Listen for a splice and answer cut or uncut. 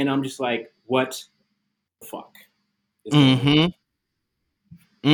uncut